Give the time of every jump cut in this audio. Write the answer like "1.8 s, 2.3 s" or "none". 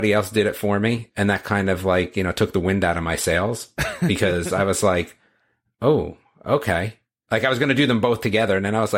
none